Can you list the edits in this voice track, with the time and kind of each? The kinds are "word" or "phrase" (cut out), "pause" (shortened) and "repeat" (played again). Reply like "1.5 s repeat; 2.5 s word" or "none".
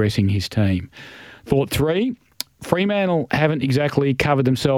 none